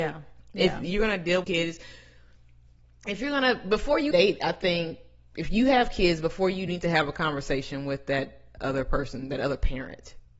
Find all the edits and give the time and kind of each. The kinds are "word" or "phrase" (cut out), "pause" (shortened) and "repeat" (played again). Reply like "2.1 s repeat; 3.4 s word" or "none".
1.4 s word; 4.1 s word; 6.7 s phrase